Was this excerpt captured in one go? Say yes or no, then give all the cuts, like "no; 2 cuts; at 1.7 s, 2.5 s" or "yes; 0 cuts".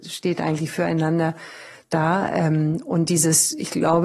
yes; 0 cuts